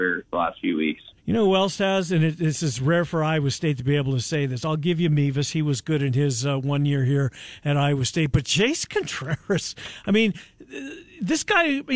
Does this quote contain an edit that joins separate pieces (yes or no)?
yes